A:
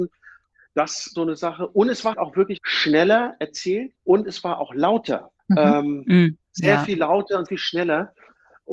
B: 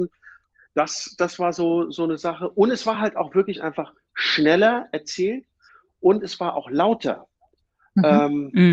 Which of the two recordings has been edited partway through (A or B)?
A